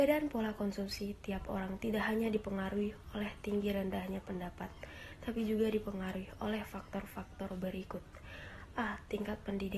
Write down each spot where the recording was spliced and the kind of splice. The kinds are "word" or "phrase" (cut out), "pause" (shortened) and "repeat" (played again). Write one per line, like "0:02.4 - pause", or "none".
none